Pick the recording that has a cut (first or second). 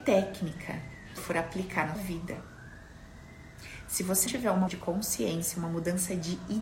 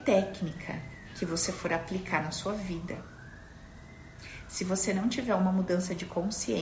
first